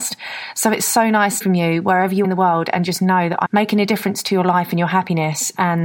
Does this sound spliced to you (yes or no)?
yes